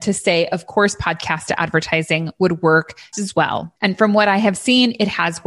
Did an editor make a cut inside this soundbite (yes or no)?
yes